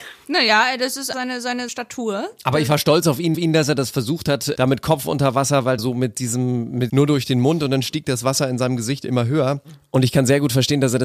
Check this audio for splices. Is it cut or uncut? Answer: cut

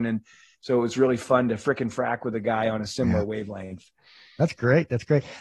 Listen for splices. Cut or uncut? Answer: uncut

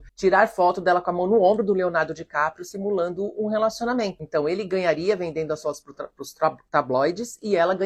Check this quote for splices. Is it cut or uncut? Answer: uncut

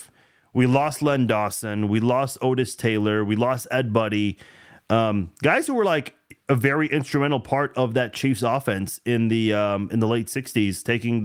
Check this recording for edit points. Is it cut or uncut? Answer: uncut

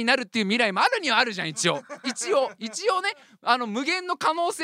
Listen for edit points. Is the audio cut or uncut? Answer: uncut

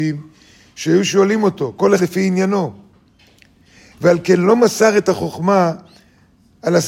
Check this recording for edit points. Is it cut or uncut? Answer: cut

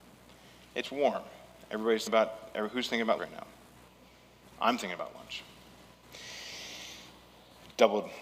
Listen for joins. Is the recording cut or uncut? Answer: cut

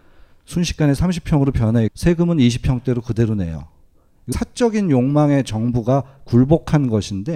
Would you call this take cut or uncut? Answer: cut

